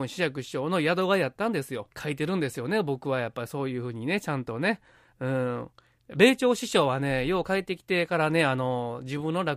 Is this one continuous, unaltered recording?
no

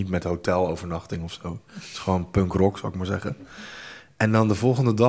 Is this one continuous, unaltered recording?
yes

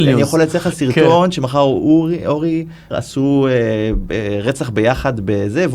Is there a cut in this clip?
yes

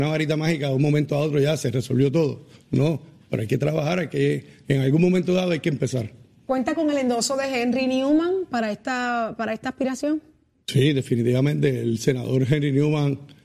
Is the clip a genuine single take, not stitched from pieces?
yes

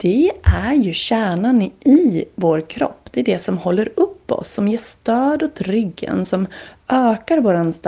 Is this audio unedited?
yes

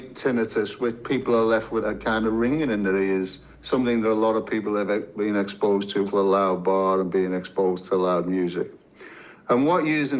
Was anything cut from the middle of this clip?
yes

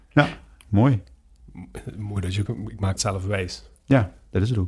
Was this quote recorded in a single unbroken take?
no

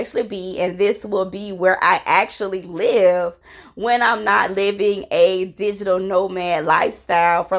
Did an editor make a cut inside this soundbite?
no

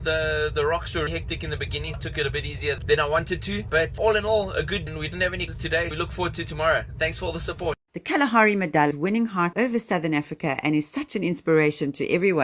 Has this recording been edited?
yes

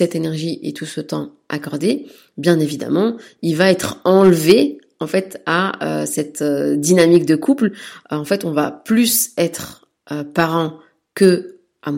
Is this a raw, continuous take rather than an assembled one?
yes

